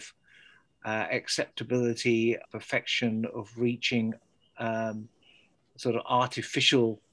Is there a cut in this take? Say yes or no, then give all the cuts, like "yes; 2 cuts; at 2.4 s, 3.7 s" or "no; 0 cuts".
yes; 1 cut; at 2.4 s